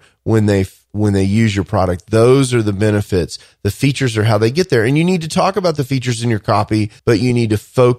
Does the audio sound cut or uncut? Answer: cut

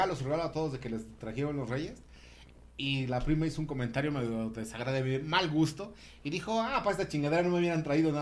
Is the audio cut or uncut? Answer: uncut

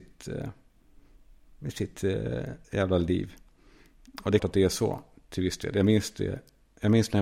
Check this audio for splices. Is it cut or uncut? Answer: cut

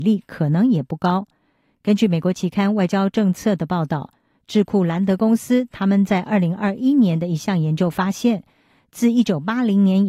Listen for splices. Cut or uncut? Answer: uncut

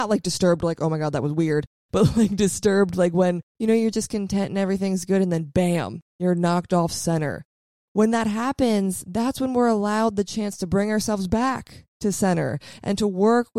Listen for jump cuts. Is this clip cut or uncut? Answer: uncut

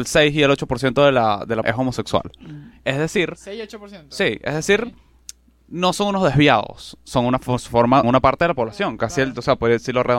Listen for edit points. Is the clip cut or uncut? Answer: cut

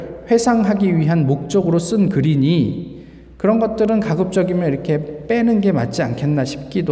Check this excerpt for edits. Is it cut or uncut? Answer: uncut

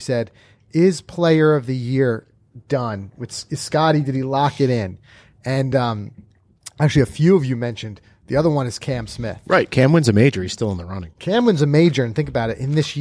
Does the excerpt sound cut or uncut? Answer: uncut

